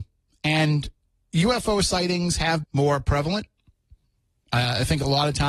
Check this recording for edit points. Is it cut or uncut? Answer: cut